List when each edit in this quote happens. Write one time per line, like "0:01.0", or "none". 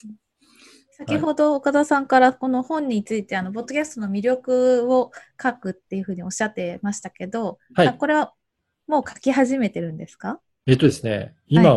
none

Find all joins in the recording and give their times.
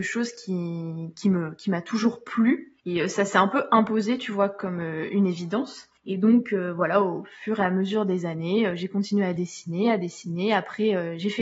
0:02.8
0:06.0

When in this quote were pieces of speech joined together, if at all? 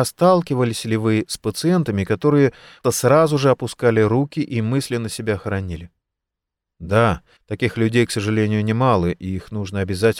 0:02.8
0:07.4

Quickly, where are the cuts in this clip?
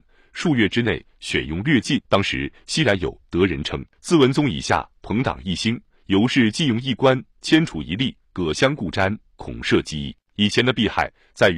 0:02.0
0:03.9
0:10.2

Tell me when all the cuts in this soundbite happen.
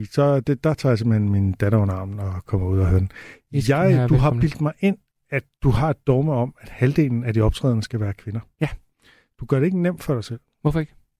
none

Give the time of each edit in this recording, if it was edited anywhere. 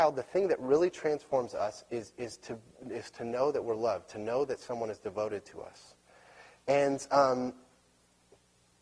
none

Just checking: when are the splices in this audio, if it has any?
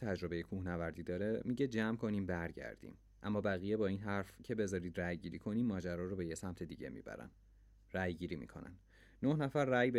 none

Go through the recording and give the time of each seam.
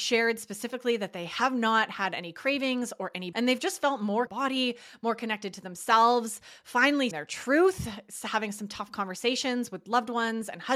0:03.3
0:04.3
0:07.1

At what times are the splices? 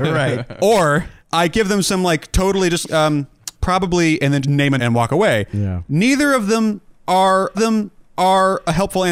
0:01.2
0:02.8
0:03.5
0:04.4
0:04.8
0:07.5

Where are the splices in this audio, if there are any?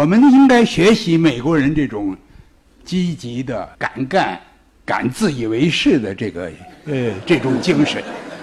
0:03.7

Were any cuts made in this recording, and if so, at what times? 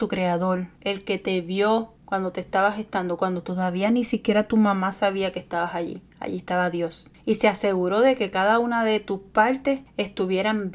none

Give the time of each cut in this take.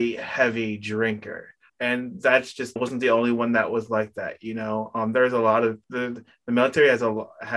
0:01.7
0:02.8
0:05.8

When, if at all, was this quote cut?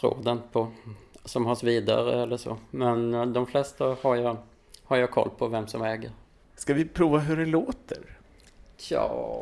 0:01.6

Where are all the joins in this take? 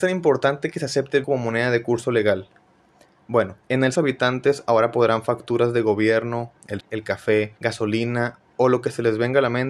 0:01.2
0:03.6
0:03.9
0:06.8
0:07.6

